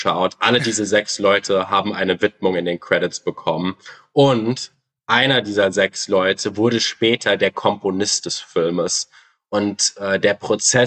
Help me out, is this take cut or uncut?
uncut